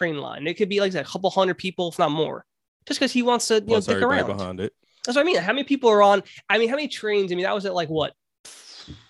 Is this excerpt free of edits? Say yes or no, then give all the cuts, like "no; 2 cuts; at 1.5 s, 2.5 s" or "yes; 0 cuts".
yes; 0 cuts